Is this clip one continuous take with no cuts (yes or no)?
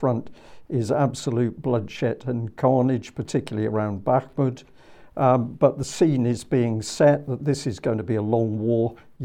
yes